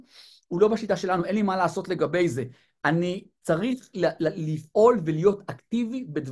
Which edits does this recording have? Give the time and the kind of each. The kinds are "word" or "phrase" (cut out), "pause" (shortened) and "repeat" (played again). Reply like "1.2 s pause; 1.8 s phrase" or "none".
none